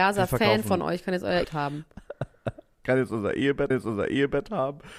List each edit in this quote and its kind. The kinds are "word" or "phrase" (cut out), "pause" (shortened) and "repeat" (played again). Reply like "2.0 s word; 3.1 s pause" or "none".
1.4 s word; 3.7 s repeat